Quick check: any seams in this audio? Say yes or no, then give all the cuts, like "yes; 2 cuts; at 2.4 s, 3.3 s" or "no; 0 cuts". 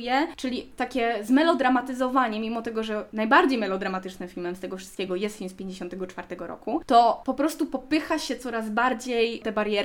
no; 0 cuts